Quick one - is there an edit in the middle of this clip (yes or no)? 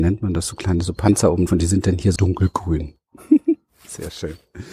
yes